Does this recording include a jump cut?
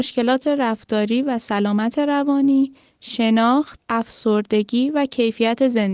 no; 0 cuts

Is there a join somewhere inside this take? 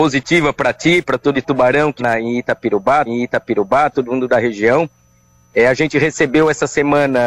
yes; 3 cuts; at 1.3 s, 2.0 s, 3.1 s

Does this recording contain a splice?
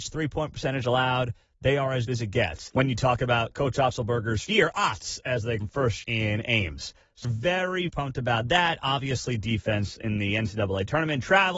yes; 7 cuts; at 2.1 s, 3.5 s, 4.4 s, 5.6 s, 6.0 s, 7.2 s, 7.9 s

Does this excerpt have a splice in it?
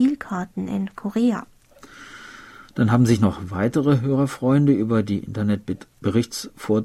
no; 0 cuts

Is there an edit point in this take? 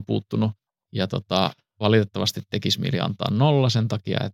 no; 0 cuts

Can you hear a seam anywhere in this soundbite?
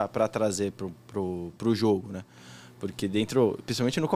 no; 0 cuts

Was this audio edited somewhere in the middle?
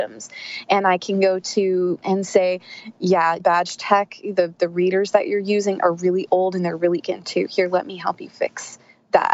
yes; 3 cuts; at 2.0 s, 3.4 s, 7.0 s

